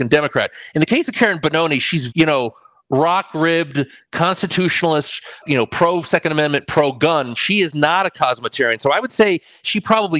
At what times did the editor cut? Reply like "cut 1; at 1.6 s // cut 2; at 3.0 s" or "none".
cut 1; at 2.1 s // cut 2; at 5.4 s